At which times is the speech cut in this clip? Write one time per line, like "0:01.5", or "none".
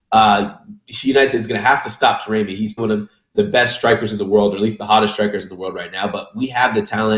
0:02.8

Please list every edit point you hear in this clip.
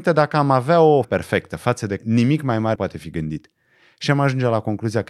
0:01.0
0:02.0
0:02.8

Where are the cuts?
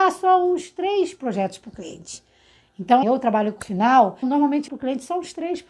0:03.0
0:03.6
0:04.2
0:04.7

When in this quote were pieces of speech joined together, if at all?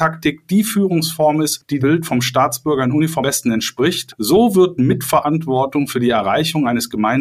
0:01.8
0:03.2

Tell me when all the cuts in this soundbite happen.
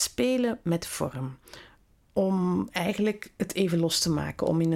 none

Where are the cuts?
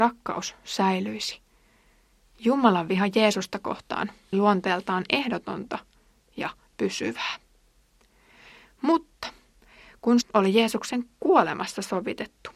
0:04.3
0:10.2

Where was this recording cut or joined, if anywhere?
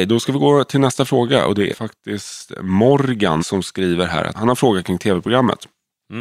0:01.7
0:03.4
0:04.3

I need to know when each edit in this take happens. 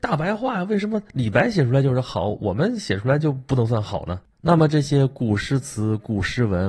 0:04.3

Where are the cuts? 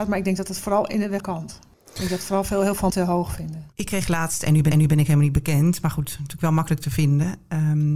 0:01.2
0:02.9
0:04.7

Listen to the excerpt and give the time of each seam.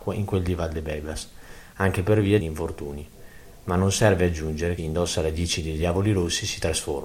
0:02.4
0:04.8

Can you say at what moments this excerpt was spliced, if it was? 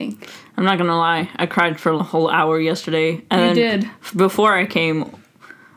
0:02.0

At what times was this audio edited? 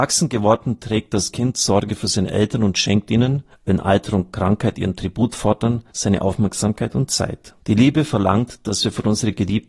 0:03.5
0:05.9
0:07.6

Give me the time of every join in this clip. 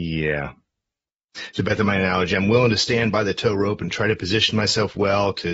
none

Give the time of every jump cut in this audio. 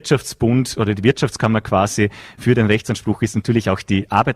none

